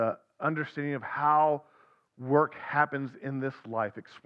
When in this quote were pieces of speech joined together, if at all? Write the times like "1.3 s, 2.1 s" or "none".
none